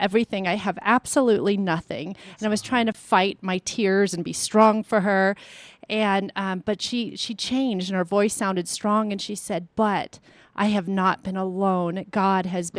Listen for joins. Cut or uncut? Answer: uncut